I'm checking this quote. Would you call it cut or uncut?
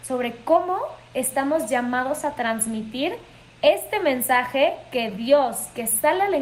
uncut